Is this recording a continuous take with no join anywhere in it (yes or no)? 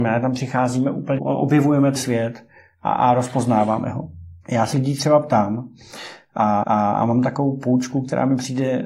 no